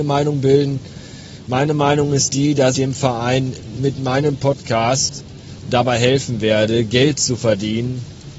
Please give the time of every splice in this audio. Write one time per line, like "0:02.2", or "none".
0:02.7
0:03.7